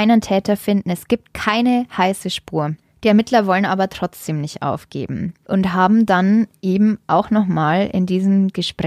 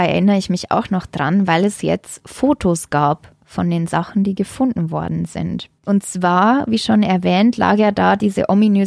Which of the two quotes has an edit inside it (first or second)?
second